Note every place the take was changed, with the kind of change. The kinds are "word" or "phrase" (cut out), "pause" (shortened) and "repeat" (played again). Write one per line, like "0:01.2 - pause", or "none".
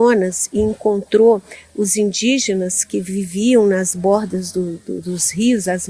none